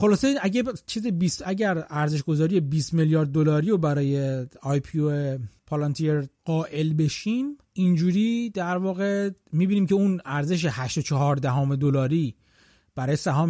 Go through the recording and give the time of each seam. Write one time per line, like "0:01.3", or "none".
none